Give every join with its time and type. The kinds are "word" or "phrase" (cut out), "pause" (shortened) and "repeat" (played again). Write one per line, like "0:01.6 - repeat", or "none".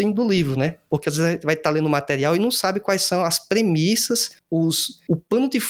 none

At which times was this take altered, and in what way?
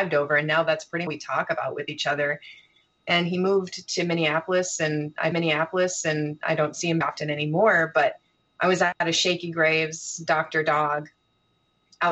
0:01.1 - phrase
0:05.3 - repeat
0:07.0 - word

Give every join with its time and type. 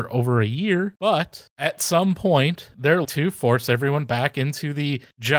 0:03.0 - phrase

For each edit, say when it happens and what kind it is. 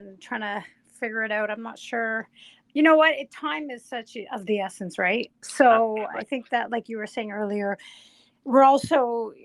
none

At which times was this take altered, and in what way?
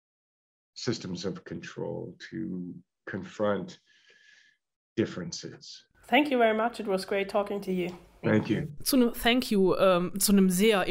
none

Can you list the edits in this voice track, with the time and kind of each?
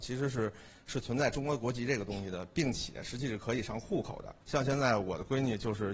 0:04.4 - pause

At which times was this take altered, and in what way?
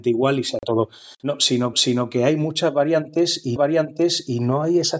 0:01.7 - repeat
0:03.6 - repeat

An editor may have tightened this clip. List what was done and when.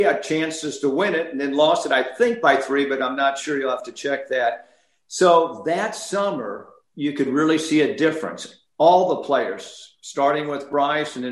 none

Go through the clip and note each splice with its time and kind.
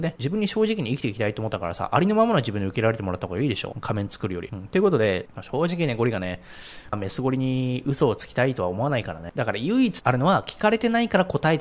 none

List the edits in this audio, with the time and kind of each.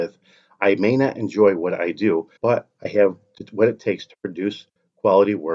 0:02.4 - pause

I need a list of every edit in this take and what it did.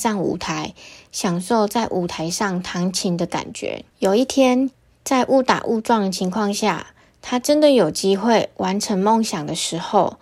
0:03.9 - pause

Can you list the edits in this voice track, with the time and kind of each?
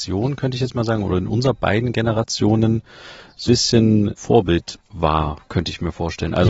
0:03.5 - word
0:04.2 - word

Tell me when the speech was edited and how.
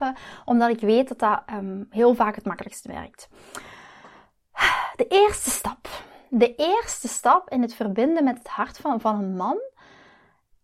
none

